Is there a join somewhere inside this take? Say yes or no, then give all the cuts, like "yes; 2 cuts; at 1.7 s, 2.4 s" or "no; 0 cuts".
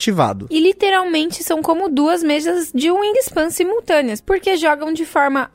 no; 0 cuts